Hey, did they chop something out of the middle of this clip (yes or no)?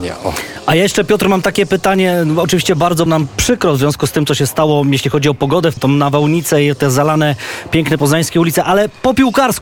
yes